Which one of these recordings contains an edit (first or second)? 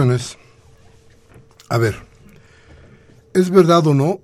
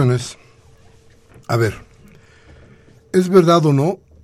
second